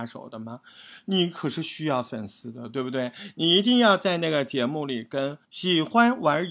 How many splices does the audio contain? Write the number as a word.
one